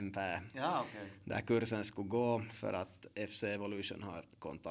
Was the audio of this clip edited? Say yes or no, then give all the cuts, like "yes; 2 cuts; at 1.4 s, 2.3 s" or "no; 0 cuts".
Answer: no; 0 cuts